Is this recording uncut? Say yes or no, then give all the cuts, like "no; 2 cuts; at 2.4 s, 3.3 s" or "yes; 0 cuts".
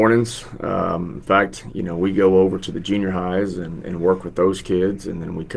yes; 0 cuts